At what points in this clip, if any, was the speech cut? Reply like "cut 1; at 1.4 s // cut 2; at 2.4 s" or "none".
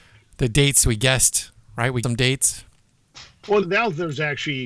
cut 1; at 2.0 s // cut 2; at 3.6 s